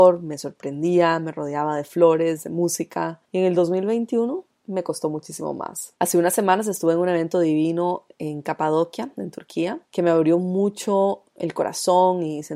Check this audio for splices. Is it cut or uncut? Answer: cut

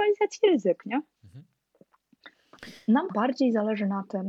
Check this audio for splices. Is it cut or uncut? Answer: cut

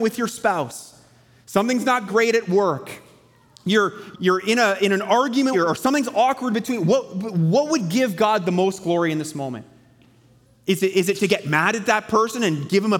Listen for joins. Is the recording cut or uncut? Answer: cut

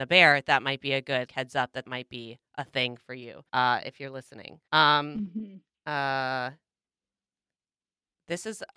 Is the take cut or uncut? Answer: cut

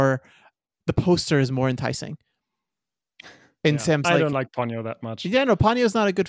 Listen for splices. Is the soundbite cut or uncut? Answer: uncut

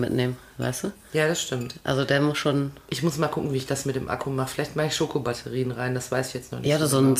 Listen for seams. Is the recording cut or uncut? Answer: uncut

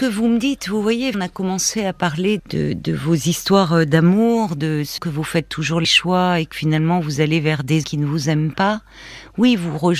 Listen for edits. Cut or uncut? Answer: cut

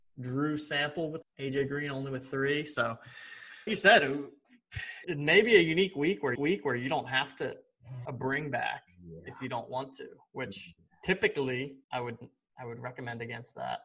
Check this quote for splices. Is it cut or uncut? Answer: cut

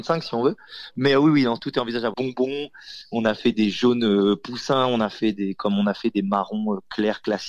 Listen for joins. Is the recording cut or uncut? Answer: cut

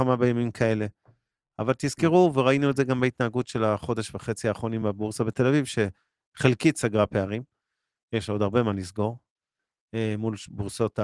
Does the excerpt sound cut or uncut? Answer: uncut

